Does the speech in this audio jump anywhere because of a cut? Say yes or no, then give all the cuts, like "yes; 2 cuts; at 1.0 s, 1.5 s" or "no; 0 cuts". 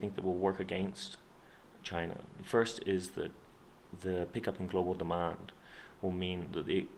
no; 0 cuts